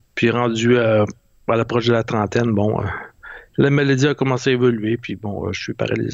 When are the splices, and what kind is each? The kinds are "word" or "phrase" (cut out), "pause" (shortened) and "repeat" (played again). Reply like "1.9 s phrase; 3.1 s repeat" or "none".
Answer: 3.5 s pause